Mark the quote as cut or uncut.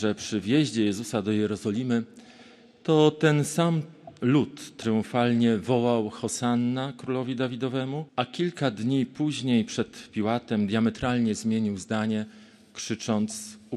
cut